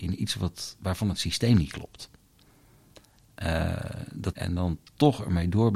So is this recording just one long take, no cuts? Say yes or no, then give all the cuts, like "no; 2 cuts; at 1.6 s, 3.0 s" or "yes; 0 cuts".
no; 1 cut; at 4.3 s